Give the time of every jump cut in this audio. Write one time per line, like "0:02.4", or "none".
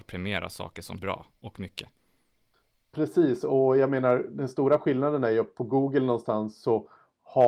0:01.0

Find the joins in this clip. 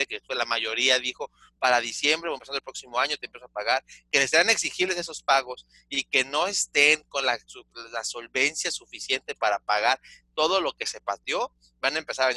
none

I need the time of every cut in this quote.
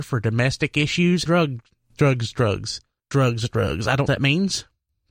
0:01.3
0:01.9
0:03.1
0:04.1

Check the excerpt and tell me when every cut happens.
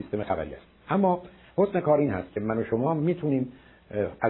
none

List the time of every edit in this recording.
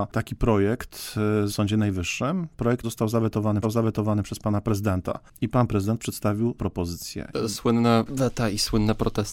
0:01.5
0:02.8
0:03.6
0:06.6

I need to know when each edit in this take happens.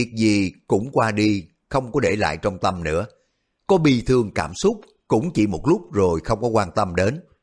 none

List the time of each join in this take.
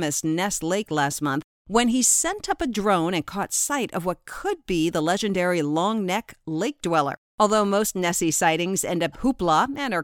0:09.1

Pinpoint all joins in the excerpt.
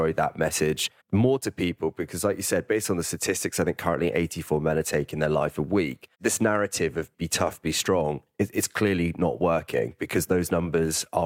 0:01.0
0:06.1

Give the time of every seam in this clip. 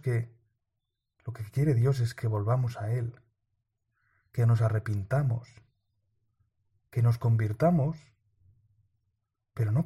none

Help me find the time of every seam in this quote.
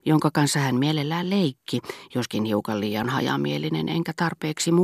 none

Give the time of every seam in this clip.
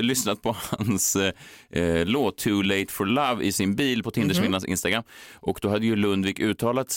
none

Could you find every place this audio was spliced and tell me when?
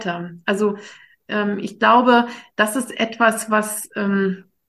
none

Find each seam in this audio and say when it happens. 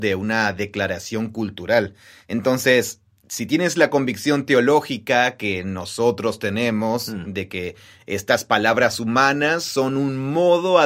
none

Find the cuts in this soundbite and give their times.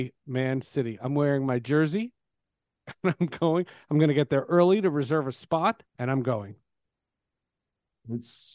0:05.9

